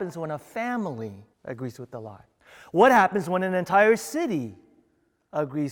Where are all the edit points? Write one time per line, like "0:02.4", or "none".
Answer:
0:01.3
0:02.4